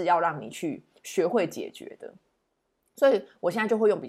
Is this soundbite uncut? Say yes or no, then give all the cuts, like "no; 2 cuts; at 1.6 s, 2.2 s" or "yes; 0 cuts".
yes; 0 cuts